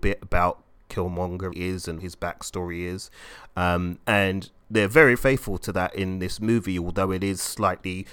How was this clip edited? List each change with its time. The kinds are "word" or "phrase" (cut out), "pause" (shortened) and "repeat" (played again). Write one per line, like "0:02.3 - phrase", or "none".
0:01.5 - phrase
0:02.0 - word
0:05.2 - word